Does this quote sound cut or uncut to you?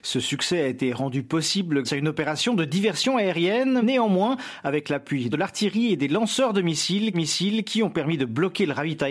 cut